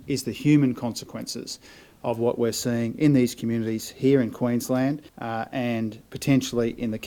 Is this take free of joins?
no; 1 cut; at 5.1 s

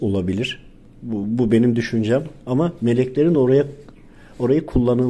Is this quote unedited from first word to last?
yes; 0 cuts

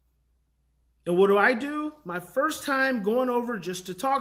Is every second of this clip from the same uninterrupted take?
yes; 0 cuts

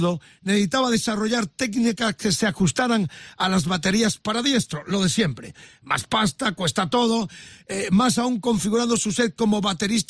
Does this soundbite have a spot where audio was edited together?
no; 0 cuts

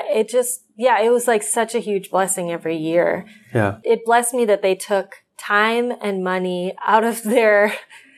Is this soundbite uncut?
no; 1 cut; at 5.3 s

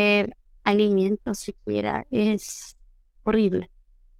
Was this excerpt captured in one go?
yes; 0 cuts

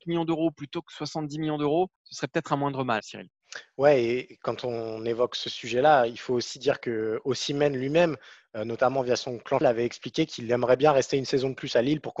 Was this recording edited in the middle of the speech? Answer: yes; 3 cuts; at 2.0 s, 3.0 s, 9.6 s

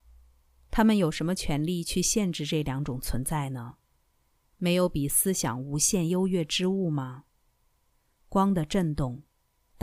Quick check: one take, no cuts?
yes; 0 cuts

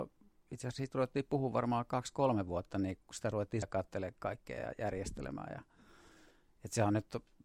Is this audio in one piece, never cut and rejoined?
no; 2 cuts; at 3.0 s, 3.6 s

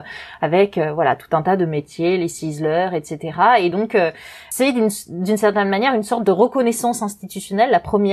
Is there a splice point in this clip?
no; 0 cuts

